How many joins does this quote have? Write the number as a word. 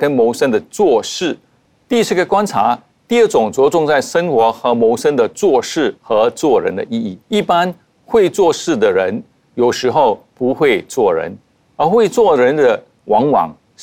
two